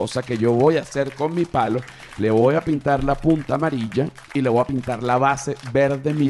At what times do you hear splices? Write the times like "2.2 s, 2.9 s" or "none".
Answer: 4.2 s

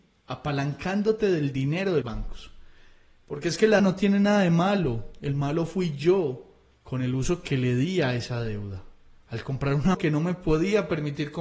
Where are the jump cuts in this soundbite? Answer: 2.0 s, 3.8 s, 9.9 s

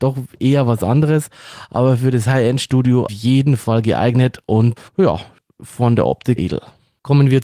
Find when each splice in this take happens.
3.1 s, 4.9 s, 6.4 s

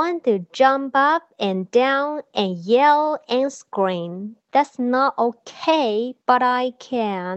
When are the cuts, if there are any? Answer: 6.2 s

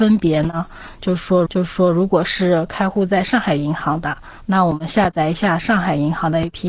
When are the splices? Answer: 1.5 s

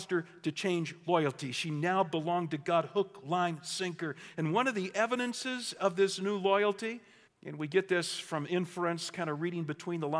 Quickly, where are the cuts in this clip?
7.3 s

